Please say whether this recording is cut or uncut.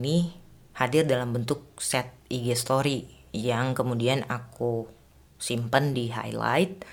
uncut